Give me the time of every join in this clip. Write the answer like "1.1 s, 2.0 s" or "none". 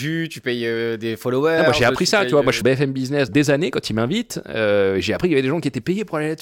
2.6 s, 3.3 s